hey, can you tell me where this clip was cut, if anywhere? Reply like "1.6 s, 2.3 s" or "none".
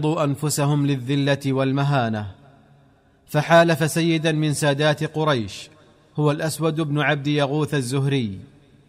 none

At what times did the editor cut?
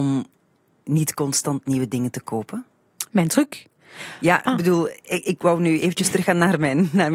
none

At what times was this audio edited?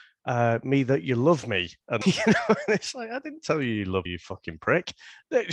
2.0 s, 4.1 s

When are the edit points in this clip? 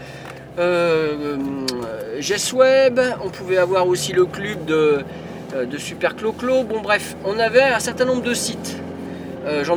none

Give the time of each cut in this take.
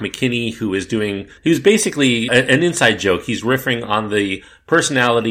1.4 s, 2.3 s

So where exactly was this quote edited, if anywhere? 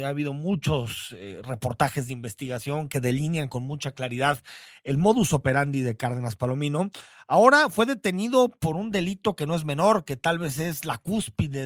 none

